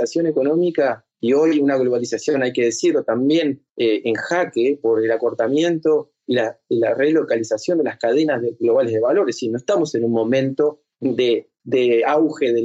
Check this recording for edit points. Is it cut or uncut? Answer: cut